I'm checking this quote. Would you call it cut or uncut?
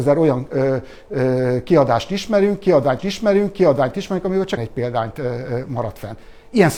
cut